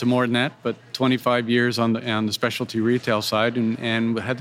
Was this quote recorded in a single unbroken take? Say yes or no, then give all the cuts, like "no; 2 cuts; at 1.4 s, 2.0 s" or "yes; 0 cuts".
yes; 0 cuts